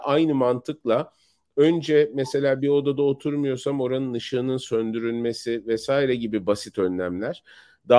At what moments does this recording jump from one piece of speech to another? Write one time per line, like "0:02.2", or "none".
none